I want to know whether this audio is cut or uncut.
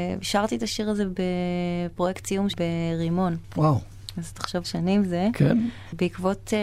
cut